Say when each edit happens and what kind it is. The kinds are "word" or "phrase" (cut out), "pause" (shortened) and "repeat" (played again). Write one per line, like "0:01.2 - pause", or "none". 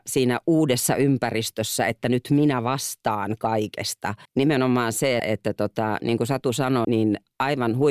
0:04.3 - pause
0:05.2 - word
0:06.8 - word

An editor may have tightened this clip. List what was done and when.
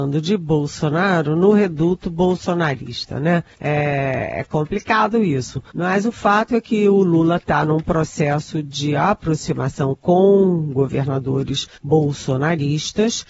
0:03.5 - pause
0:05.7 - pause
0:11.7 - pause

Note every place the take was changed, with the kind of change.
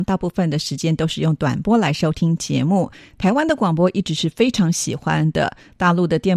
none

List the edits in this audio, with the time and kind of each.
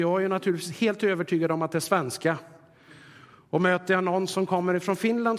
none

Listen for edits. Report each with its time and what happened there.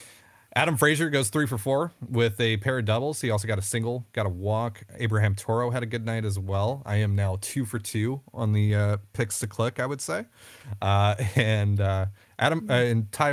none

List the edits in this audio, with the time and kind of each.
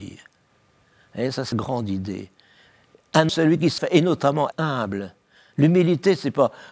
0:01.5 - word
0:03.3 - word
0:03.8 - word
0:04.5 - word

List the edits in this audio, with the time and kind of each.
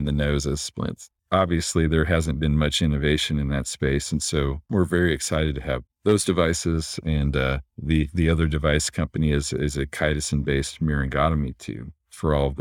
0:01.2 - pause
0:04.6 - pause
0:05.9 - pause
0:07.7 - pause

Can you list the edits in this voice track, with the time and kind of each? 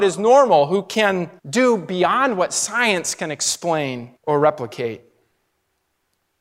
0:01.4 - pause
0:04.2 - pause

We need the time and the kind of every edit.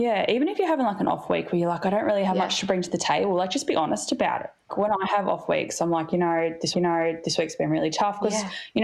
0:04.7 - word
0:06.7 - repeat

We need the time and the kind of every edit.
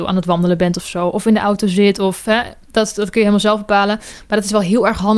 none

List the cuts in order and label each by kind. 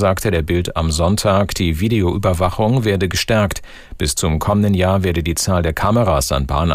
none

